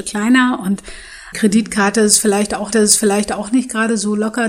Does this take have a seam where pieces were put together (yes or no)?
yes